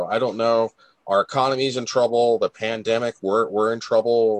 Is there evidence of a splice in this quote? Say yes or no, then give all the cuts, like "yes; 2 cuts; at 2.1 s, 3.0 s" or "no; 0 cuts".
no; 0 cuts